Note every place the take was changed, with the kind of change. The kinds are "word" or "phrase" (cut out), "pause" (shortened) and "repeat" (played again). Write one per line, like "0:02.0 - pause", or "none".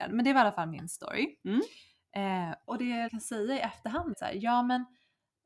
0:02.7 - word
0:03.1 - word
0:04.1 - word